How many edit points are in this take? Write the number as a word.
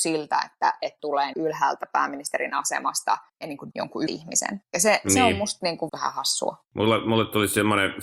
six